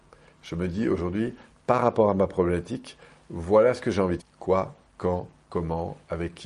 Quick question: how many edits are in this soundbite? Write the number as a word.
one